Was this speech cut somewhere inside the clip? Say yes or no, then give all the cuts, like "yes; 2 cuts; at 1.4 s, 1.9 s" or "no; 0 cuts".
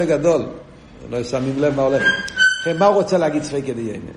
no; 0 cuts